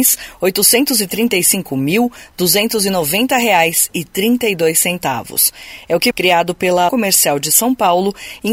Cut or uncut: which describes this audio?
cut